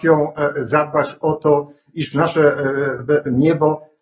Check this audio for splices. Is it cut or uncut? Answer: uncut